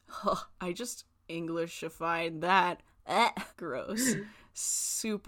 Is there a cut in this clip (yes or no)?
yes